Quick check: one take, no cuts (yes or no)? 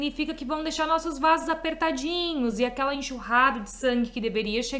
yes